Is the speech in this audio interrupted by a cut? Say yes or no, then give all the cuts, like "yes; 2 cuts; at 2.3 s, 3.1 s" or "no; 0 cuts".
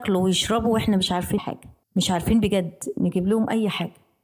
yes; 2 cuts; at 1.4 s, 1.8 s